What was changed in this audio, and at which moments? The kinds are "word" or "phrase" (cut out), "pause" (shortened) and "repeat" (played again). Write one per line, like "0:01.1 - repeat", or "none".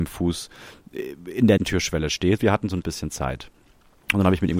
0:01.6 - word
0:02.4 - word
0:02.8 - word